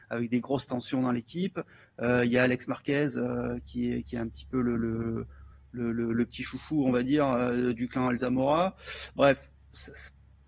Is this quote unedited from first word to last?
yes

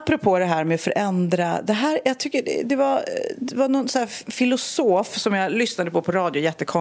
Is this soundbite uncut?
yes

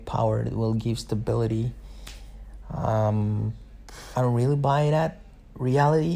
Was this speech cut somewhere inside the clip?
yes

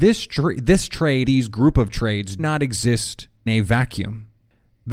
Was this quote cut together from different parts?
yes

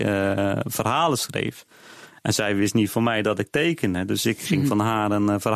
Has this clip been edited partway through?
no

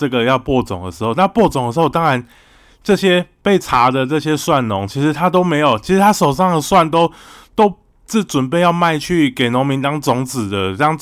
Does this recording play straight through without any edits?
yes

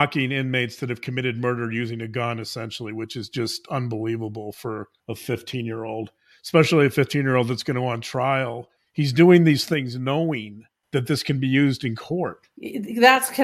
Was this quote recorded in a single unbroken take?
yes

